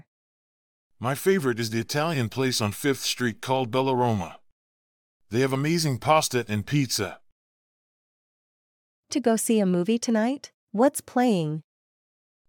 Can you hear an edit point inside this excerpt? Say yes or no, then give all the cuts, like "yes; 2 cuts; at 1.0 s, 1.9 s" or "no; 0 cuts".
yes; 2 cuts; at 9.1 s, 10.6 s